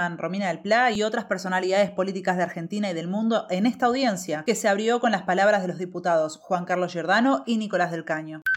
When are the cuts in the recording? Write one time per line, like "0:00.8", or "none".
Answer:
none